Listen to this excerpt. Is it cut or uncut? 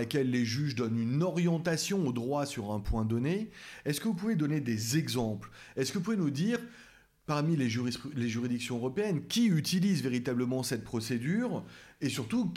uncut